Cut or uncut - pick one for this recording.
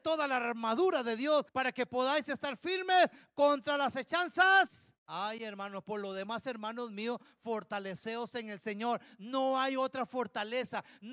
cut